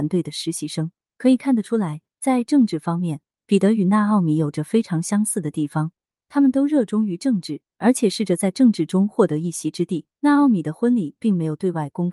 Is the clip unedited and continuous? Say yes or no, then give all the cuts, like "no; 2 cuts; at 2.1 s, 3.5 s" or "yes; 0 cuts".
no; 2 cuts; at 7.7 s, 10.1 s